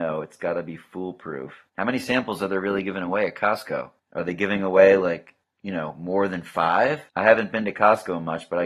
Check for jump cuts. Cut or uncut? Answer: cut